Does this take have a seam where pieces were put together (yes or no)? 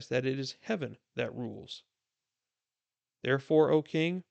no